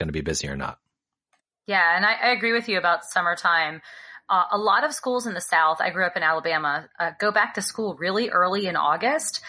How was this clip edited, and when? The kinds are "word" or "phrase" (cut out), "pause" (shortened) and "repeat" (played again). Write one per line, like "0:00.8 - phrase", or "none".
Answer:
none